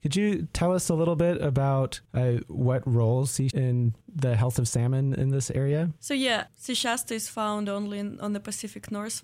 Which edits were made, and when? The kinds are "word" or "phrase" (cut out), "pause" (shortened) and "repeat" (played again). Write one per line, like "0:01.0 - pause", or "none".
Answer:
0:02.0 - pause
0:03.5 - phrase
0:04.0 - pause
0:06.0 - pause
0:06.5 - word